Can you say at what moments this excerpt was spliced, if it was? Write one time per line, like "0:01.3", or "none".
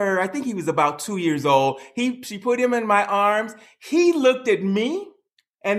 none